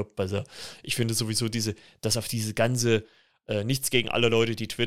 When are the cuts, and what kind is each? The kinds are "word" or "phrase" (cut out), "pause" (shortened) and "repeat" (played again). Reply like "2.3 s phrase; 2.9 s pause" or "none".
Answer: none

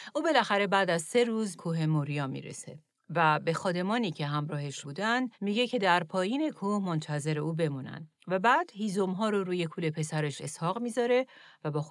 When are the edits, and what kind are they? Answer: 1.6 s word; 2.9 s pause; 4.8 s word; 5.3 s pause; 8.2 s pause

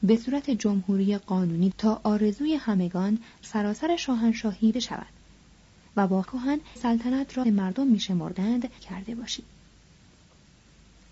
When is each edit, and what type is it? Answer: 1.7 s word; 3.4 s word; 4.7 s word; 6.2 s word; 6.8 s word; 7.4 s word; 8.8 s word

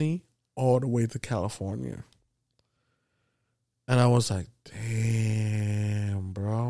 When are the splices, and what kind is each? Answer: none

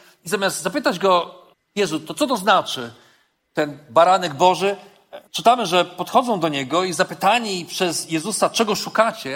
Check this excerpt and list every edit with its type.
1.5 s pause; 5.3 s pause

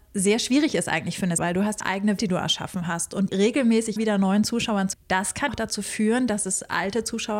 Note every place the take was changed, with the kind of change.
1.4 s word; 1.8 s word; 2.2 s word; 3.3 s word; 4.0 s word; 4.9 s word; 5.5 s word

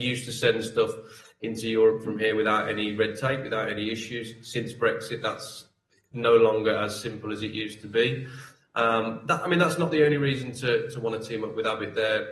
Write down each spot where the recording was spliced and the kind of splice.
none

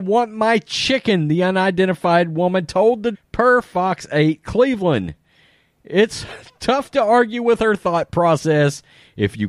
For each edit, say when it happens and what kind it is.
3.1 s word

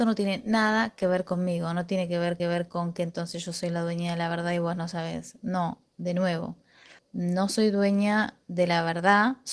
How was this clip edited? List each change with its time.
2.4 s repeat; 7.0 s pause

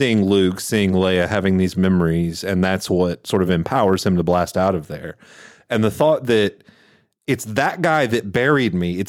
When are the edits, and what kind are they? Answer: none

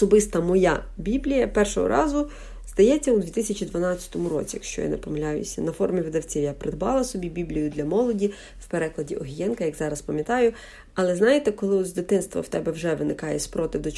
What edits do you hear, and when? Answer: none

